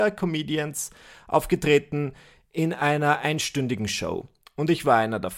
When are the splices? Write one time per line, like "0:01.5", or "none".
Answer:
none